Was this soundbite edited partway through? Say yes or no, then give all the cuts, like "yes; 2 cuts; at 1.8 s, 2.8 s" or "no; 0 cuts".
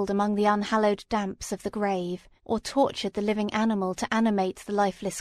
yes; 1 cut; at 2.4 s